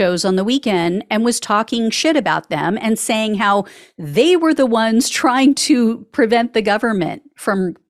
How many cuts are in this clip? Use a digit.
0